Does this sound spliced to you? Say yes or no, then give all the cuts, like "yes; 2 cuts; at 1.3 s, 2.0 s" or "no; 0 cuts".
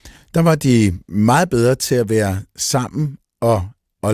no; 0 cuts